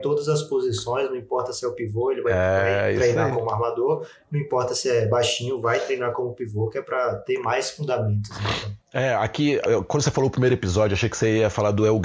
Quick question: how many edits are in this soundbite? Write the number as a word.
two